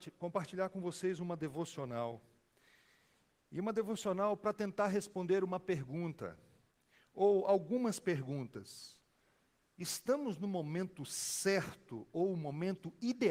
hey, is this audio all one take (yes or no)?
yes